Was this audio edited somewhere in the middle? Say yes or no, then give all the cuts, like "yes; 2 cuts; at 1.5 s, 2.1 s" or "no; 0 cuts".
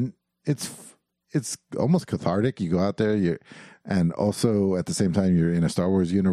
no; 0 cuts